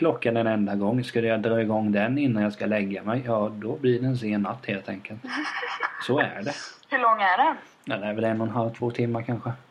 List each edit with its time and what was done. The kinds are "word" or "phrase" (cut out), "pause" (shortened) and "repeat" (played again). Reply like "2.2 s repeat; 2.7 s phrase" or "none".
none